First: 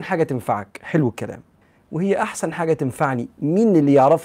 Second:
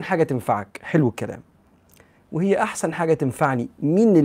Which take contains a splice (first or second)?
first